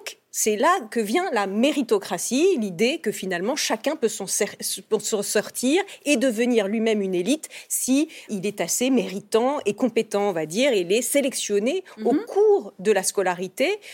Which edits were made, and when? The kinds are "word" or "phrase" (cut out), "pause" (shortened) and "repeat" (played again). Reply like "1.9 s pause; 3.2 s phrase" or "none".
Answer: 8.3 s word